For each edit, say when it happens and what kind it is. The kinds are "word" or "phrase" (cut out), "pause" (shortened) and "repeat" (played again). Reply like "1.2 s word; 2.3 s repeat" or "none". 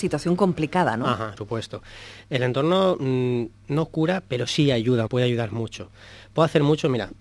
1.4 s word; 5.1 s word